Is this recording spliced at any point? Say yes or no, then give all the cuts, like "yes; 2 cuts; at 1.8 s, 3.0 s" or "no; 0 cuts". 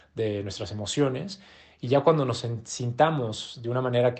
no; 0 cuts